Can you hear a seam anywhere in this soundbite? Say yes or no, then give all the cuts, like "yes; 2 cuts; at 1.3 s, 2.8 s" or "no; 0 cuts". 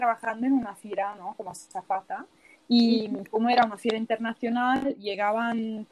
no; 0 cuts